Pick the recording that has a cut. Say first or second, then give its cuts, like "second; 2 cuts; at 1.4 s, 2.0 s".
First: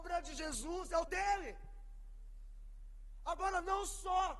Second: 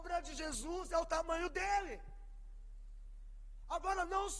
first; 1 cut; at 1.1 s